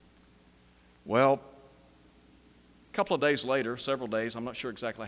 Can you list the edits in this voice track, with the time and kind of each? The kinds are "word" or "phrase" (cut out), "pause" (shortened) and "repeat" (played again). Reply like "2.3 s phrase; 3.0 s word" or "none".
none

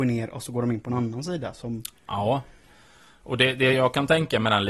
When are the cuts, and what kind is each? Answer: none

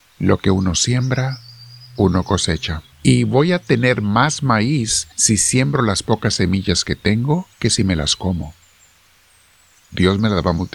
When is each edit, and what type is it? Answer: 2.9 s pause; 5.1 s pause; 7.5 s pause

